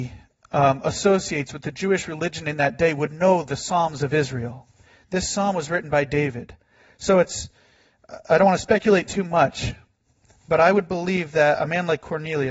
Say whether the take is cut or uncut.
uncut